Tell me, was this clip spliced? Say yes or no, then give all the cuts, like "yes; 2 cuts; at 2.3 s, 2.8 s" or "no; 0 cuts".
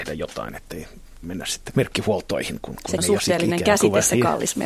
yes; 3 cuts; at 1.2 s, 1.7 s, 3.0 s